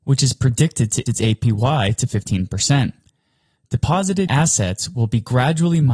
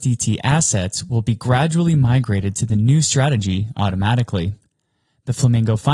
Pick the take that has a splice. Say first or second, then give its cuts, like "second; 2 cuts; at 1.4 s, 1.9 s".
first; 2 cuts; at 1.1 s, 4.3 s